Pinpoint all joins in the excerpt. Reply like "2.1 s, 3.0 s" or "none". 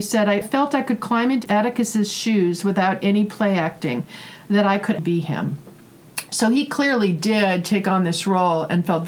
5.0 s